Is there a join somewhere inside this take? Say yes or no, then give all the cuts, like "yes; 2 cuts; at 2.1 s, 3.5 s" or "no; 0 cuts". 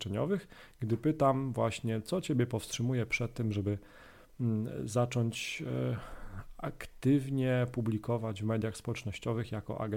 no; 0 cuts